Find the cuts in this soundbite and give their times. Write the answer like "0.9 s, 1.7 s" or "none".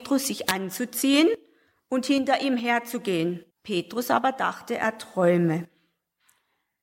3.5 s